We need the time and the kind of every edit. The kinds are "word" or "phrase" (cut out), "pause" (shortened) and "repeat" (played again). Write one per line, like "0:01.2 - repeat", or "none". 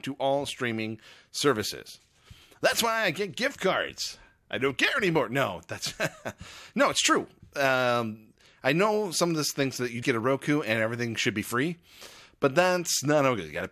0:10.0 - word